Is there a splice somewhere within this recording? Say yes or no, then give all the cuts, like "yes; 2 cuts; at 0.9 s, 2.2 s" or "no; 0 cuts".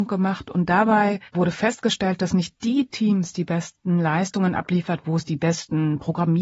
yes; 1 cut; at 1.3 s